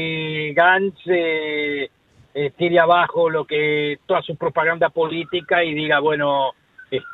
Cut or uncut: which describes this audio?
uncut